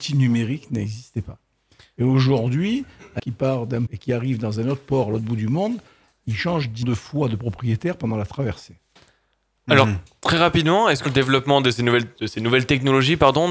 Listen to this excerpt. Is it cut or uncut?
cut